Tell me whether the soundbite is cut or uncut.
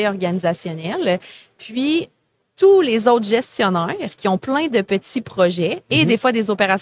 uncut